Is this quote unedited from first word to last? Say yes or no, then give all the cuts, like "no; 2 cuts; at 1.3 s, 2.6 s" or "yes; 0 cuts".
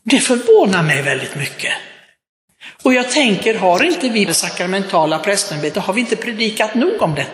no; 1 cut; at 4.3 s